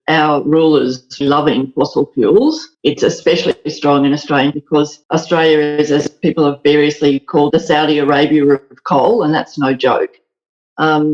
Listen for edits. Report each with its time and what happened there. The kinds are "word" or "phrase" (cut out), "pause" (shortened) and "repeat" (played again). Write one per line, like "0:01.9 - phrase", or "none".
0:01.2 - word
0:02.7 - pause
0:04.5 - word
0:05.0 - pause
0:07.5 - word